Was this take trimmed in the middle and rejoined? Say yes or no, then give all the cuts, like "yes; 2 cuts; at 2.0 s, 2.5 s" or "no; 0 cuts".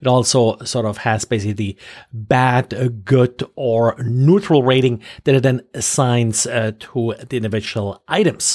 no; 0 cuts